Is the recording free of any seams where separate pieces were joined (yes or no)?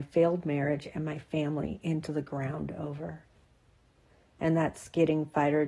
yes